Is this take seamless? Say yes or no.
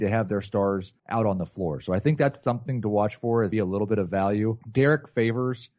no